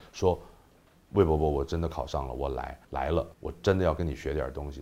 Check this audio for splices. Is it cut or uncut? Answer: cut